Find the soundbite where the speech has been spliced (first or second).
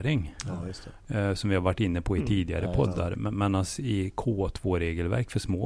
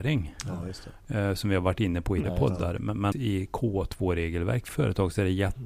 second